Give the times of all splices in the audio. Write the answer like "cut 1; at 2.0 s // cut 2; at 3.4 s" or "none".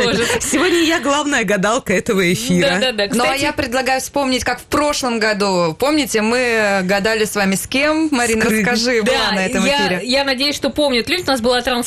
cut 1; at 9.0 s